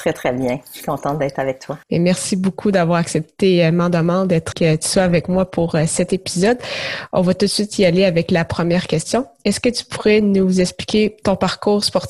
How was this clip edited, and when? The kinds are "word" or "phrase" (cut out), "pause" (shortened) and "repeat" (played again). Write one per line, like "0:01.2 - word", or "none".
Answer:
0:01.8 - pause
0:04.5 - phrase